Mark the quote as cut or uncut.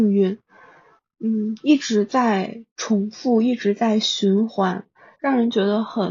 uncut